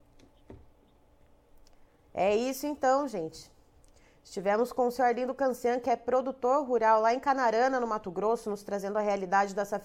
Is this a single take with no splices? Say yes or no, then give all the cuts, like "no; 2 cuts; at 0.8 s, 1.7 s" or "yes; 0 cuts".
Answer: yes; 0 cuts